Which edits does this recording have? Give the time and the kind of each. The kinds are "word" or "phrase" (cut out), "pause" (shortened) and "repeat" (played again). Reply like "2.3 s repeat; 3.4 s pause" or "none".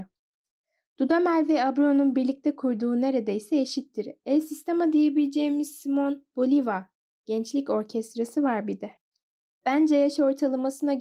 none